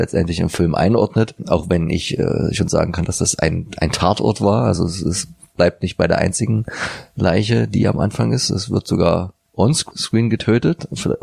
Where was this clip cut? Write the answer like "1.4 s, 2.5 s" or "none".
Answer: none